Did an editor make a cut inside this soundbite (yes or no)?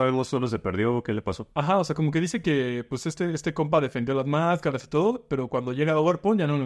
no